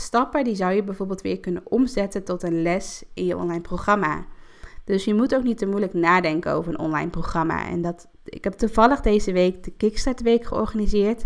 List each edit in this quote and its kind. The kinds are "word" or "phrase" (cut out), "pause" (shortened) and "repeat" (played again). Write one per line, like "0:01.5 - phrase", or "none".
0:08.1 - pause